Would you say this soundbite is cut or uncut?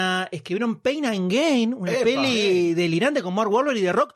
uncut